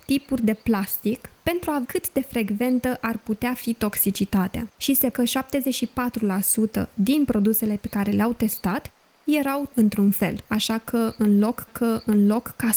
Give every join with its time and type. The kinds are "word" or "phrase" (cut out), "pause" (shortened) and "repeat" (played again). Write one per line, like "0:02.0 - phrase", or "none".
0:01.8 - word
0:04.7 - pause
0:05.1 - word
0:09.7 - word
0:10.4 - pause
0:11.7 - repeat